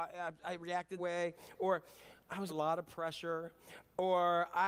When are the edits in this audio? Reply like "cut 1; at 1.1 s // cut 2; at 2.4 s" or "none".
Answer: cut 1; at 1.0 s // cut 2; at 2.5 s